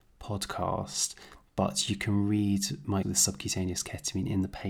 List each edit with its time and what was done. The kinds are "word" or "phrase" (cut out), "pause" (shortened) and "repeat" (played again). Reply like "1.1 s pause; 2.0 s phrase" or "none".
3.0 s word